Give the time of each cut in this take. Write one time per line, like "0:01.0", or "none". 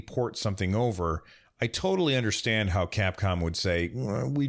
none